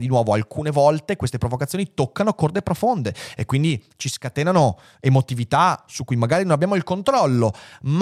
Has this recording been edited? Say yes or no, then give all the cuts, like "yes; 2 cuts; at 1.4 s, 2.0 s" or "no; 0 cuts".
no; 0 cuts